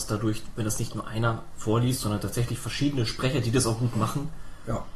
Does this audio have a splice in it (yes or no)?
no